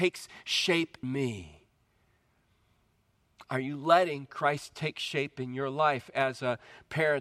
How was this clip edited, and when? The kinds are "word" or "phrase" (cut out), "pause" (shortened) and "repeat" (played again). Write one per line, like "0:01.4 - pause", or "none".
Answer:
0:01.0 - word